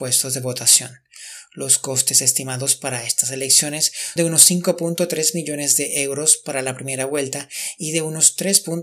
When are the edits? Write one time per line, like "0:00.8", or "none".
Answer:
0:04.2